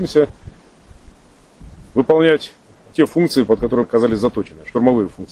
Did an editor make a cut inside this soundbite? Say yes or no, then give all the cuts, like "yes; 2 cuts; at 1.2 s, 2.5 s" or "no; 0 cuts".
yes; 2 cuts; at 2.9 s, 3.8 s